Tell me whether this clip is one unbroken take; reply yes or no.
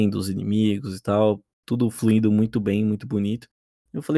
yes